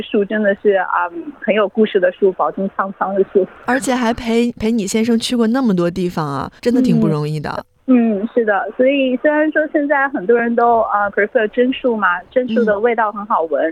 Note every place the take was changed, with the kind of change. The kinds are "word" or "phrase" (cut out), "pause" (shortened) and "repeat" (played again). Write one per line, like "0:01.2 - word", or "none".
0:06.6 - pause
0:07.8 - pause
0:11.1 - word

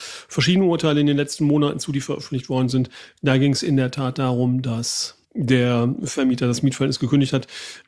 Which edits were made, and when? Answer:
0:05.2 - pause

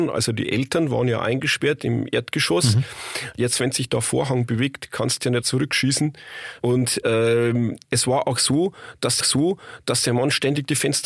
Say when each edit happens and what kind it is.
0:05.4 - word
0:07.8 - pause
0:09.2 - repeat

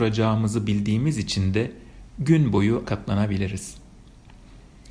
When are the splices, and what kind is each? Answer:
0:02.8 - word

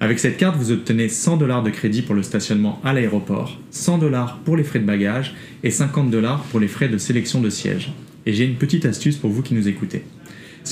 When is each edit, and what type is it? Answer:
none

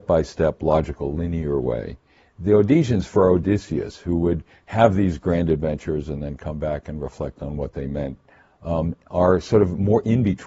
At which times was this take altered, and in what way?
none

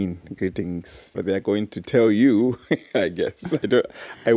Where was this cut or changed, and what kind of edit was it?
0:01.1 - word

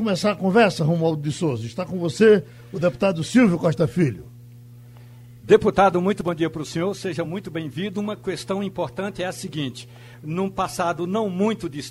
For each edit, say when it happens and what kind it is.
none

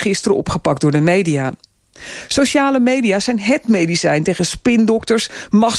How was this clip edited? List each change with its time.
none

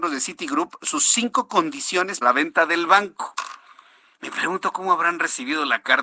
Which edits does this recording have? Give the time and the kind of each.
0:02.2 - word

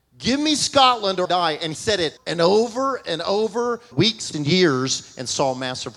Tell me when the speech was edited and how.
0:01.2 - word
0:01.7 - word
0:02.2 - word
0:03.9 - word
0:04.3 - word

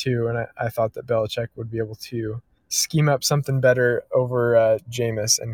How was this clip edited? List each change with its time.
0:02.6 - pause

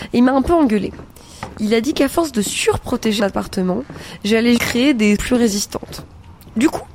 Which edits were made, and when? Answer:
0:03.2 - word
0:04.6 - word
0:05.2 - word

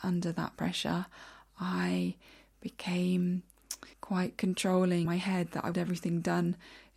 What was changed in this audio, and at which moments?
0:03.9 - pause
0:05.1 - word
0:05.7 - word

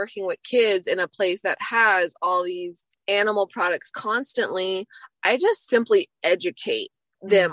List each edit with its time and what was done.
0:02.9 - pause

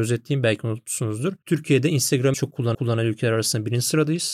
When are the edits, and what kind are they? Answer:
0:02.3 - word
0:02.7 - repeat

